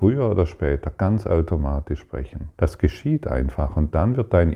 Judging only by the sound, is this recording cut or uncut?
cut